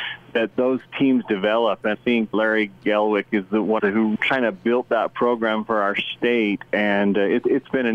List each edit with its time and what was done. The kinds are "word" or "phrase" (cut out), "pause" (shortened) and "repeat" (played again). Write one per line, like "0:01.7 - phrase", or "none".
0:01.9 - word
0:02.3 - word
0:03.8 - phrase
0:04.2 - word